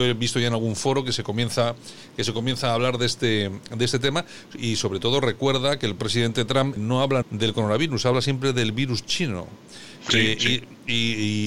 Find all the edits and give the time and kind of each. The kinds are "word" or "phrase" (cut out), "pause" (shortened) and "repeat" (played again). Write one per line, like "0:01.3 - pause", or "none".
0:06.0 - word
0:06.8 - word
0:07.2 - word

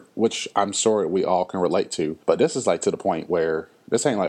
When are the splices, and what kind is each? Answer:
0:02.2 - pause

